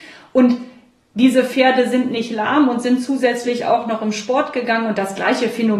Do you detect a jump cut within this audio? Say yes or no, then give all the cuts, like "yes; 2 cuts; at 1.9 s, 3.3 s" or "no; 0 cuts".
no; 0 cuts